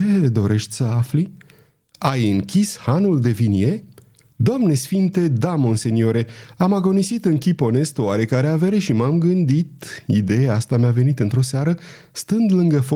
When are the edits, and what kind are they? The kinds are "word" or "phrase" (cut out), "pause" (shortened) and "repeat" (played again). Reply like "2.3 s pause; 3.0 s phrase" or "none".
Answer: none